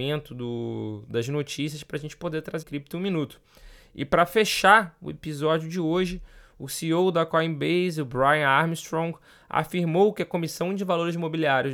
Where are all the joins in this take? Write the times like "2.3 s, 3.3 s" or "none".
2.6 s